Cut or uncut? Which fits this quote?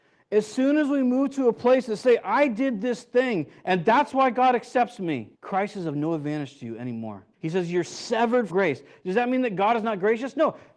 cut